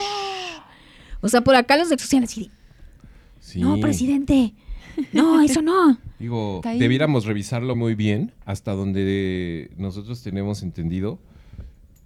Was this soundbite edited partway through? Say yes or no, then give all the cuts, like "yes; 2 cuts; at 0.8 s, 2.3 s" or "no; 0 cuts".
yes; 3 cuts; at 2.0 s, 6.6 s, 7.7 s